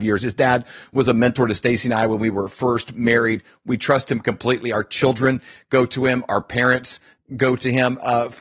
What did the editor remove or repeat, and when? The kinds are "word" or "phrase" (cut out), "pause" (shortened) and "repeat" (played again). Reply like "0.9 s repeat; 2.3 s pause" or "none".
none